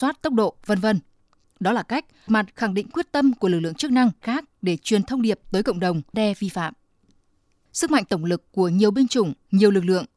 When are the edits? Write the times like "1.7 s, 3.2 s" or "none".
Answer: 2.3 s, 4.2 s, 6.1 s